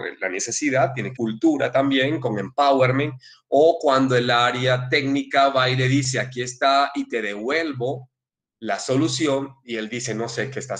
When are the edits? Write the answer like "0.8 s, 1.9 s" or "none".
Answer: 1.1 s